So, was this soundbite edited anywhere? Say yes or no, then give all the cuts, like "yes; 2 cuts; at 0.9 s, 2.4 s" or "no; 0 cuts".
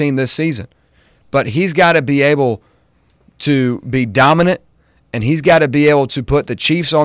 no; 0 cuts